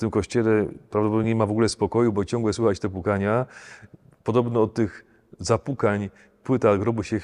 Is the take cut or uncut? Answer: uncut